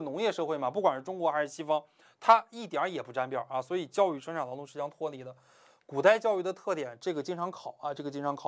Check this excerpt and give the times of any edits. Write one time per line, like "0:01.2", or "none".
none